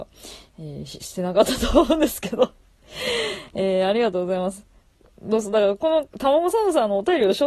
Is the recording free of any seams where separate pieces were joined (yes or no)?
yes